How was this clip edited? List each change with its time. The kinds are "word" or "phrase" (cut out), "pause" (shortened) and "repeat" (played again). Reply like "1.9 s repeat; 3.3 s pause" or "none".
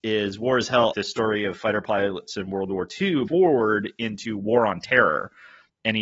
0.9 s phrase; 3.3 s phrase